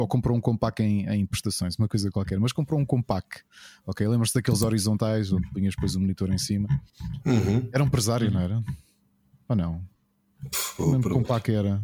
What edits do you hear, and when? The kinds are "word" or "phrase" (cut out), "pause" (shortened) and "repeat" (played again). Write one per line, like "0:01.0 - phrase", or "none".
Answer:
none